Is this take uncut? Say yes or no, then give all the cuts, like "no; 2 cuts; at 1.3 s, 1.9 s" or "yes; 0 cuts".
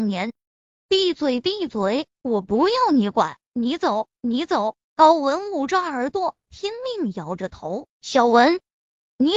no; 3 cuts; at 4.8 s, 6.4 s, 7.9 s